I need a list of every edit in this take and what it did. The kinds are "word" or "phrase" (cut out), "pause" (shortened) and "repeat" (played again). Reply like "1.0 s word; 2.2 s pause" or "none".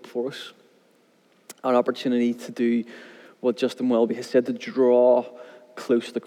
none